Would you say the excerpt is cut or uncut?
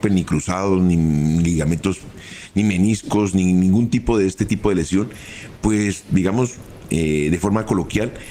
uncut